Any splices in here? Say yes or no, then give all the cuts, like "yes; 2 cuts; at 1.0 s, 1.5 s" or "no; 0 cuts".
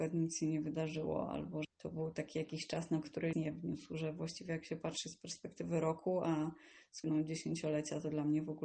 yes; 4 cuts; at 1.6 s, 3.0 s, 3.3 s, 7.0 s